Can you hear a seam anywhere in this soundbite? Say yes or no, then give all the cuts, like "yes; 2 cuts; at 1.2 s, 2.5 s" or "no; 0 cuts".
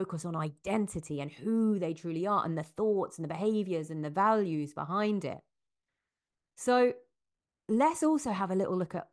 no; 0 cuts